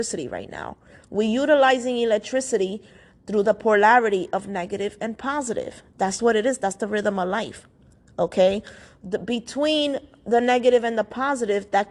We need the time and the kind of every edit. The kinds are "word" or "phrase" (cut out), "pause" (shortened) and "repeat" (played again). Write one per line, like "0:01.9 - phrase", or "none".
0:06.2 - word